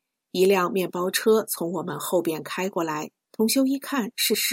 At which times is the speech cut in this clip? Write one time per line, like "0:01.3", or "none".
0:03.2